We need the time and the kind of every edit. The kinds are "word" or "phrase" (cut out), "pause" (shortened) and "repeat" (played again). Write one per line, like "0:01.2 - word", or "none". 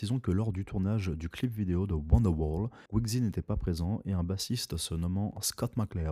0:02.9 - pause